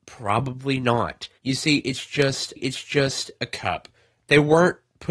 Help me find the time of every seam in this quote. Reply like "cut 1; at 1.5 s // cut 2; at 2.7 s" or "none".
cut 1; at 1.4 s // cut 2; at 2.6 s